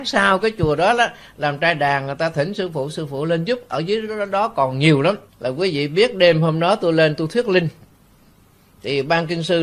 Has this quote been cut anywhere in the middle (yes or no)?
yes